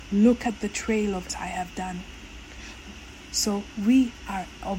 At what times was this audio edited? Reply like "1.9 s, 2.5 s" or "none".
1.3 s